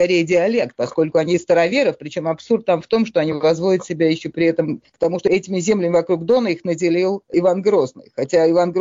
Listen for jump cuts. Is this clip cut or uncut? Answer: uncut